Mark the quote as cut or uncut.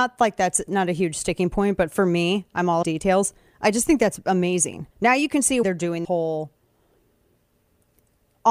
cut